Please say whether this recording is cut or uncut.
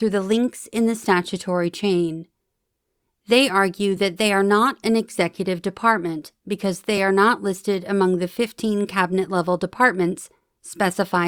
uncut